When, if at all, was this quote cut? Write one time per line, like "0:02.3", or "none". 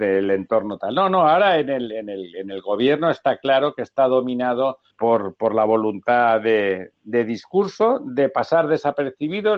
0:04.9